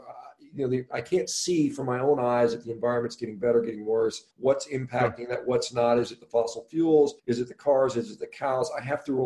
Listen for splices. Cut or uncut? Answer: cut